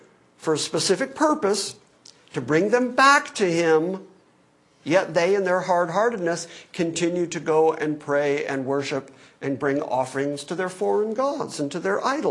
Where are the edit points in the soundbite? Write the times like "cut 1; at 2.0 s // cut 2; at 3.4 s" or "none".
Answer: none

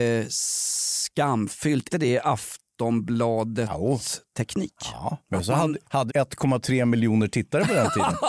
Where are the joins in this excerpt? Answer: cut 1; at 1.9 s // cut 2; at 5.2 s // cut 3; at 6.1 s

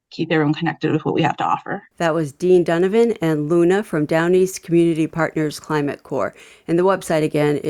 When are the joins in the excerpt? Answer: cut 1; at 1.9 s

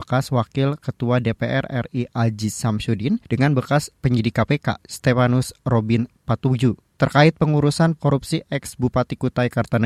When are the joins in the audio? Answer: cut 1; at 3.2 s // cut 2; at 8.0 s

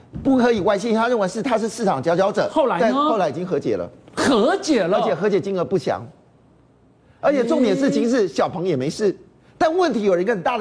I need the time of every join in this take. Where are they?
none

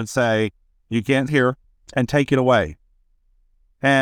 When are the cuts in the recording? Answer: cut 1; at 1.3 s // cut 2; at 1.6 s

